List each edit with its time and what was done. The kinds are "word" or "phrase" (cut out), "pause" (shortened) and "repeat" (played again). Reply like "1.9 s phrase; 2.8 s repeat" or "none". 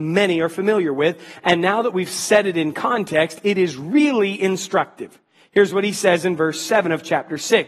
none